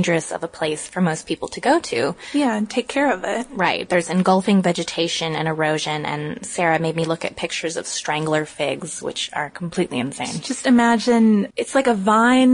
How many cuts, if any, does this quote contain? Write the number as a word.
one